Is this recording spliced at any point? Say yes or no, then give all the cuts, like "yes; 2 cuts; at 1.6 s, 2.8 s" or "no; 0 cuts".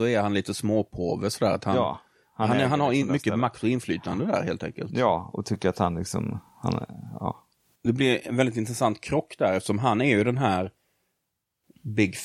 no; 0 cuts